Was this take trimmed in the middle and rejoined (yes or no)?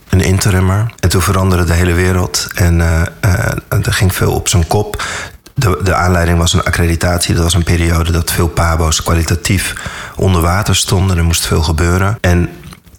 no